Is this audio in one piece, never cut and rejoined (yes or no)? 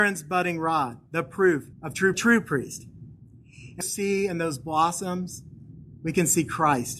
no